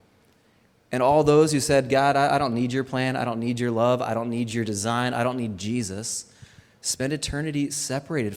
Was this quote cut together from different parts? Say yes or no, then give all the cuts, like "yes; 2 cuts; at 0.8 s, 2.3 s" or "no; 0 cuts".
no; 0 cuts